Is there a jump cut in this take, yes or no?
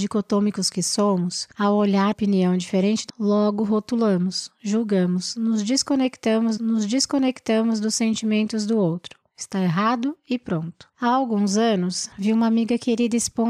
yes